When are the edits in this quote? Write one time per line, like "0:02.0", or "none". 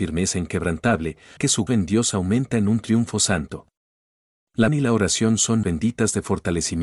0:01.4
0:01.7
0:04.7
0:05.6